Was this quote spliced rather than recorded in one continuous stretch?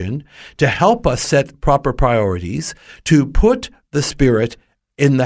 no; 0 cuts

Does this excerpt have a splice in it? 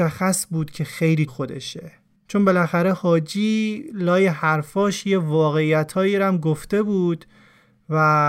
yes; 1 cut; at 1.3 s

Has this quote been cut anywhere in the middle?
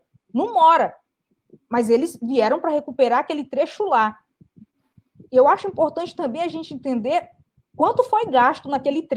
no; 0 cuts

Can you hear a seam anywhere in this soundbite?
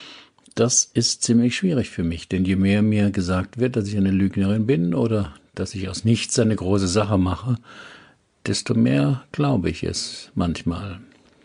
no; 0 cuts

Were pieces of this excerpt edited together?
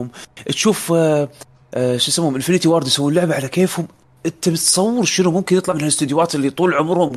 no; 0 cuts

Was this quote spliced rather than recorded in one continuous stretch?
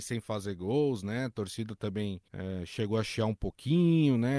yes; 1 cut; at 2.3 s

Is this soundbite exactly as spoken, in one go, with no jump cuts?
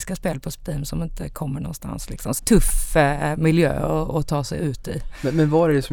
no; 1 cut; at 2.4 s

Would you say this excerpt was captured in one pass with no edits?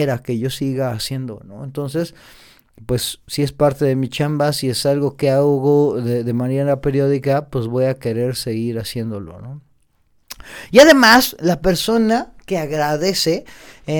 yes; 0 cuts

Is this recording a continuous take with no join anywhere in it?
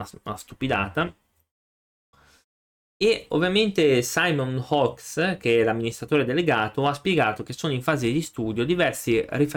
yes; 0 cuts

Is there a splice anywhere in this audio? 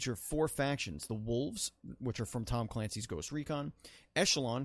no; 0 cuts

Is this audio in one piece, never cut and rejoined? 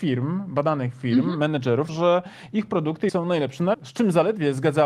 no; 3 cuts; at 1.9 s, 3.1 s, 3.7 s

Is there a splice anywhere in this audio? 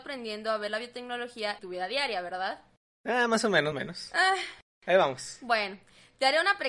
yes; 2 cuts; at 1.6 s, 3.7 s

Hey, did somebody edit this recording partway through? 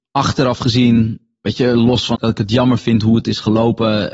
yes; 1 cut; at 2.1 s

